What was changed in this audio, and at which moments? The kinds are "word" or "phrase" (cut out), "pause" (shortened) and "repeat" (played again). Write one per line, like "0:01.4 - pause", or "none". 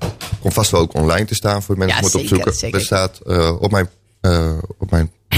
0:02.7 - word